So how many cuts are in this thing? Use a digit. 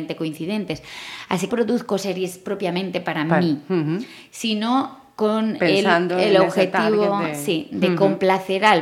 1